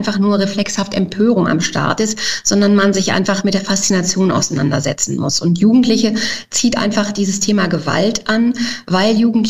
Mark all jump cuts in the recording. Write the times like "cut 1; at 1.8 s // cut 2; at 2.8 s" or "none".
none